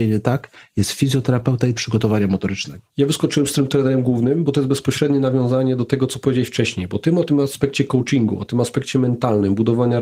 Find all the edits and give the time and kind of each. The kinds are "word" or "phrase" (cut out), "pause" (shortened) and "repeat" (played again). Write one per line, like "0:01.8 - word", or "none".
0:01.8 - word
0:02.9 - pause